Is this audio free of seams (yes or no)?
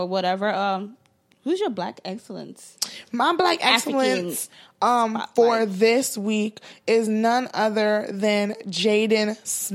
yes